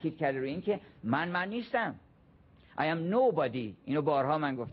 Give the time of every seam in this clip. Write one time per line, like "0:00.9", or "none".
none